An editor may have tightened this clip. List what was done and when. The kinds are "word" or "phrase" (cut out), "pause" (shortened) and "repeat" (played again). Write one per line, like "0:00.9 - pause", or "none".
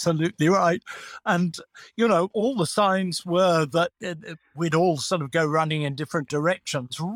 none